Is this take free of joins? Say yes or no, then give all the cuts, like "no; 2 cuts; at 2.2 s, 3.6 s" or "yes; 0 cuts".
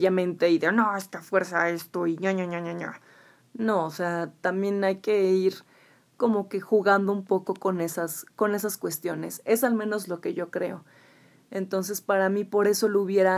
yes; 0 cuts